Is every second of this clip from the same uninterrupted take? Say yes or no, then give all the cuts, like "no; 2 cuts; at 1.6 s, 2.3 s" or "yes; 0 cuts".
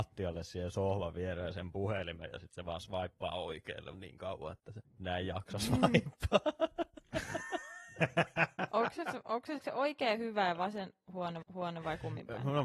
no; 4 cuts; at 3.9 s, 4.8 s, 9.6 s, 11.4 s